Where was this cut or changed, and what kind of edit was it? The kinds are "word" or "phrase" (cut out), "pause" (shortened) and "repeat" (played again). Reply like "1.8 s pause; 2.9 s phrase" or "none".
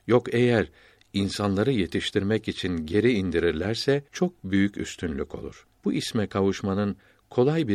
4.1 s pause; 5.8 s pause